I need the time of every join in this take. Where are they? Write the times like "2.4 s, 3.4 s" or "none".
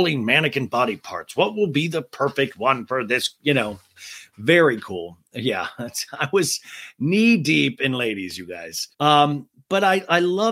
8.9 s